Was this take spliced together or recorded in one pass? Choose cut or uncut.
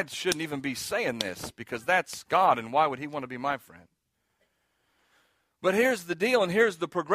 uncut